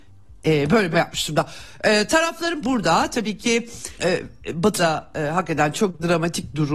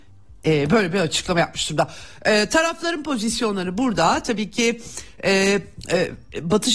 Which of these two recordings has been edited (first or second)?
first